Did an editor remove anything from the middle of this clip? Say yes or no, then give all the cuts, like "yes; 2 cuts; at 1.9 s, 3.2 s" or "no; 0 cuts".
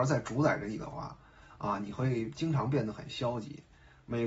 no; 0 cuts